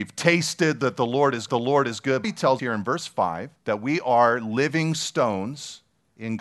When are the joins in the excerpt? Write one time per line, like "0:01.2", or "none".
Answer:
0:01.5
0:02.2
0:02.6
0:03.6